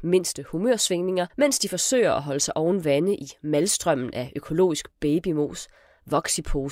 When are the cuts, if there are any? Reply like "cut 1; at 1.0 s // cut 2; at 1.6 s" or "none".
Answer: cut 1; at 1.3 s